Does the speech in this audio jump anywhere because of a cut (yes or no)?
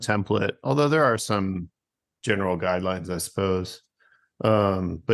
no